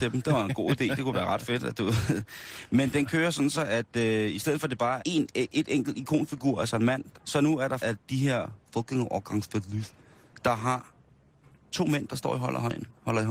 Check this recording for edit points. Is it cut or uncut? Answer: cut